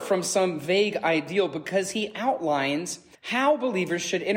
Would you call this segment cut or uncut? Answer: cut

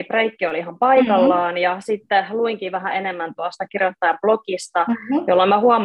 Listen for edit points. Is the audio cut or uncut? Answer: uncut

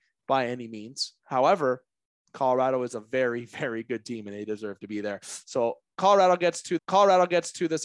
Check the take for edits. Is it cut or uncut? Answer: cut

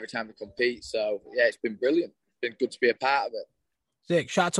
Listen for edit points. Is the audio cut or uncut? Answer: uncut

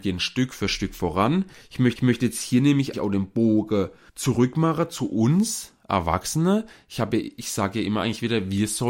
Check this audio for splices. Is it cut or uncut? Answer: cut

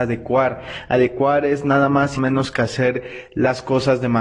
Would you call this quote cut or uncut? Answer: cut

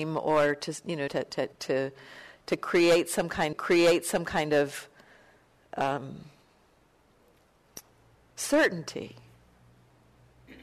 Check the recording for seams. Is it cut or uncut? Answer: cut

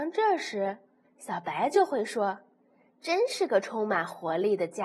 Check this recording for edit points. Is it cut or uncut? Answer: uncut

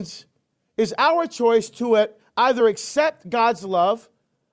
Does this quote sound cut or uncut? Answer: uncut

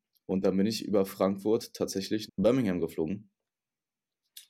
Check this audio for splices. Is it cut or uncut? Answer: cut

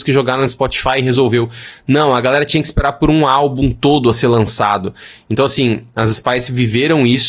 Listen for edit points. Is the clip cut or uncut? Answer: uncut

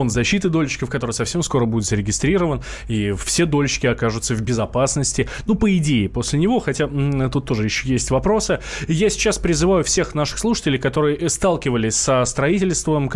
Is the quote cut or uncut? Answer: uncut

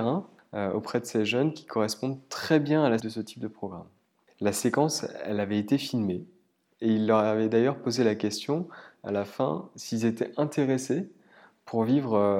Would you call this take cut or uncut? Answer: cut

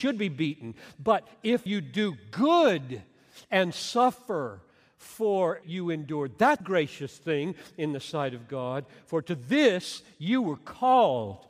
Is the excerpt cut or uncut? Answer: cut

